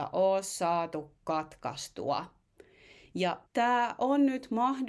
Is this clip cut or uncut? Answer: cut